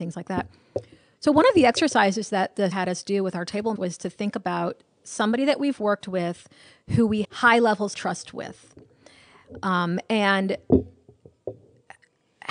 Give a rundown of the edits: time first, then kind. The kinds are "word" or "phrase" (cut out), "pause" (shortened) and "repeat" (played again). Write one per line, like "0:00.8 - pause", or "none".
0:02.7 - word
0:03.8 - word
0:07.2 - word
0:07.9 - word